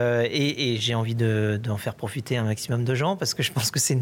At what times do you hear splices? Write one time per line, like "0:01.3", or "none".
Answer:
none